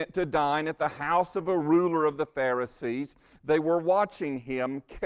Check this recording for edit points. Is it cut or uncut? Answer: uncut